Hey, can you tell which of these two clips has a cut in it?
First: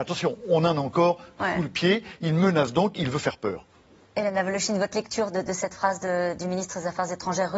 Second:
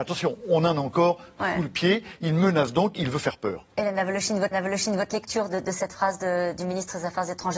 second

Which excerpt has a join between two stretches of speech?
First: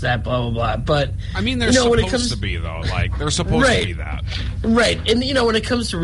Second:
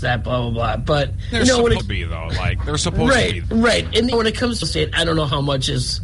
second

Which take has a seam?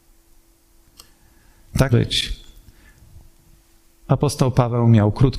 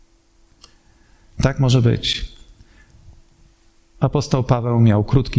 first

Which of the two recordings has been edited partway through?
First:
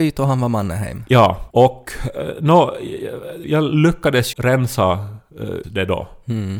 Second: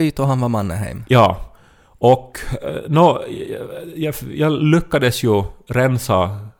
first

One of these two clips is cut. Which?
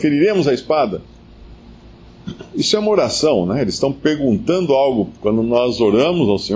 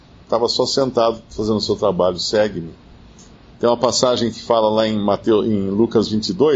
first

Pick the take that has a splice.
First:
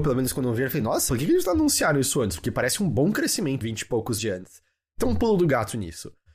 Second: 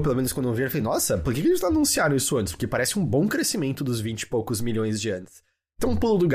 first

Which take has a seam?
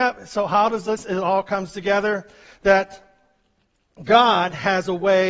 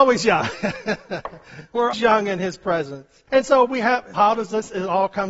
second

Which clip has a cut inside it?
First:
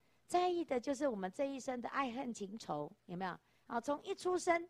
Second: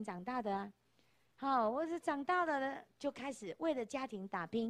first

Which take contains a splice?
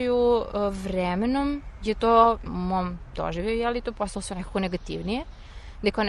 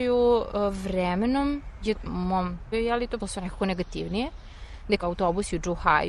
second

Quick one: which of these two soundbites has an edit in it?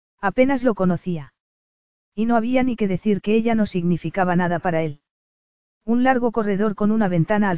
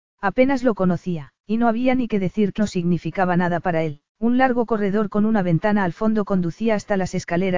second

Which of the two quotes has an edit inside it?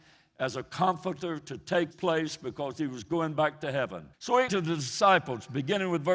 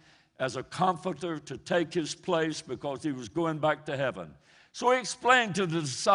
first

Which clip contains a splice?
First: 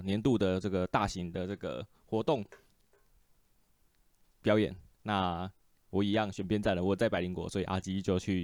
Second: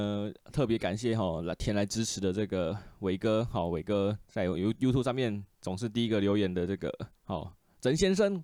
second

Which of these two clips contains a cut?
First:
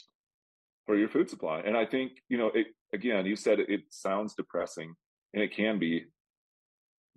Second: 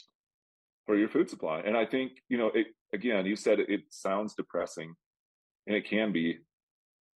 first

